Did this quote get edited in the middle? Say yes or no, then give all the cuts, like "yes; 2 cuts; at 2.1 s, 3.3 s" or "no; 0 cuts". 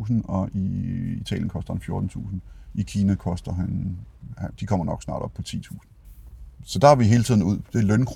no; 0 cuts